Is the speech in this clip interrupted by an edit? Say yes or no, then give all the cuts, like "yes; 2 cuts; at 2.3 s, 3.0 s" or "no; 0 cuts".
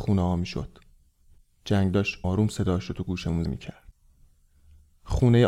yes; 2 cuts; at 2.2 s, 3.5 s